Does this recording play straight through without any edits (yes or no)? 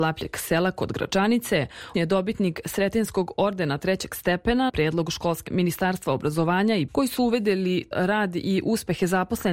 no